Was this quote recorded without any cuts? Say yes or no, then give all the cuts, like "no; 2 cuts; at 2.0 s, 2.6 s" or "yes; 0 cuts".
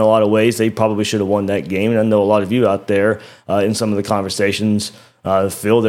yes; 0 cuts